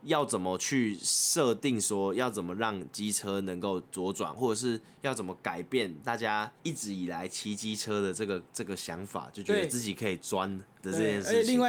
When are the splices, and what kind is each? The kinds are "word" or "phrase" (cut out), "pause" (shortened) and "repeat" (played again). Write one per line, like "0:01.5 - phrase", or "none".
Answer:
0:06.6 - pause
0:08.5 - pause